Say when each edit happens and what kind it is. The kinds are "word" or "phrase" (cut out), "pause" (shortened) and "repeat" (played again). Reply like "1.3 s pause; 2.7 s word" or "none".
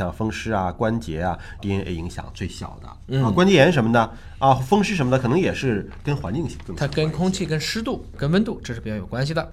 1.6 s phrase